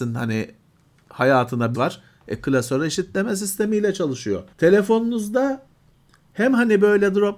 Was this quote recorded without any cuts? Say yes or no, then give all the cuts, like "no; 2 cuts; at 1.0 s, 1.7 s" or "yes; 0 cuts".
no; 2 cuts; at 1.7 s, 4.5 s